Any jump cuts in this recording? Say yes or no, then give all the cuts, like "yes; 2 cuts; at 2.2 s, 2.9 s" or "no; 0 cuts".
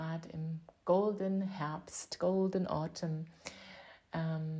no; 0 cuts